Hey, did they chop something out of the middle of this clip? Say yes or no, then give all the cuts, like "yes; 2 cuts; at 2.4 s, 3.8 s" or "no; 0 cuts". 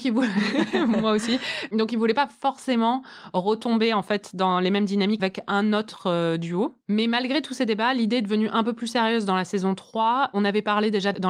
yes; 1 cut; at 5.2 s